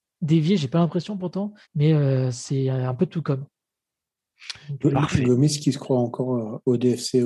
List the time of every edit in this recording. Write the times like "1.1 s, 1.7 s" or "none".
1.6 s